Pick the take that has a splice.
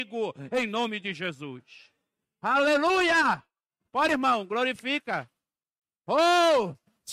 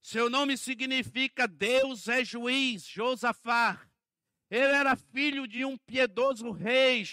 first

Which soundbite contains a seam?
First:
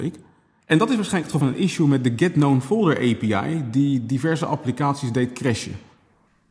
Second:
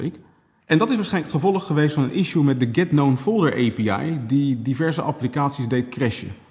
first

